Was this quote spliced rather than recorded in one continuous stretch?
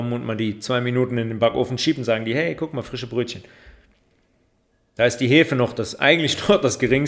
no; 0 cuts

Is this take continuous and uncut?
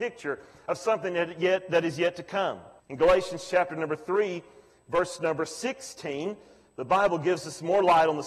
no; 1 cut; at 2.8 s

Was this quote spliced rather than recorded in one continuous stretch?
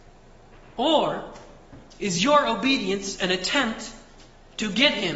no; 0 cuts

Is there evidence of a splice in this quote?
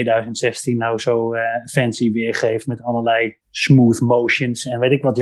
yes; 1 cut; at 3.4 s

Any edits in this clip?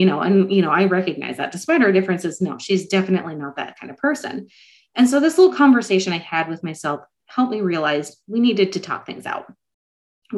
no; 0 cuts

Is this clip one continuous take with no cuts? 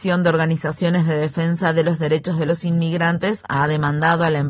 yes; 0 cuts

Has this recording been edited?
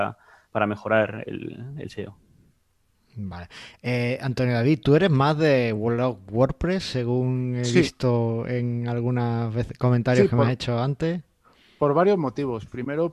no; 0 cuts

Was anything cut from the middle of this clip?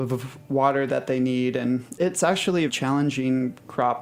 yes; 2 cuts; at 2.0 s, 2.7 s

